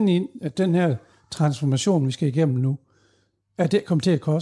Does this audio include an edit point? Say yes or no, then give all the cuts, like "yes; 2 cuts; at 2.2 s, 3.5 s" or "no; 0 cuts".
no; 0 cuts